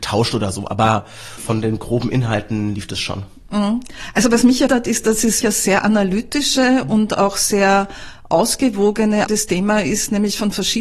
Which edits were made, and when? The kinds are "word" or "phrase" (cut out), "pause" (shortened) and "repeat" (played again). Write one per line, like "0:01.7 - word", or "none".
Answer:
0:01.4 - word
0:04.7 - word
0:05.4 - word
0:09.3 - word